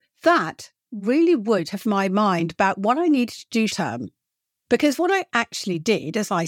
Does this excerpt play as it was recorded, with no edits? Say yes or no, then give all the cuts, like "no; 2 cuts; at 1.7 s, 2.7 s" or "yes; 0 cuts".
no; 2 cuts; at 1.8 s, 3.7 s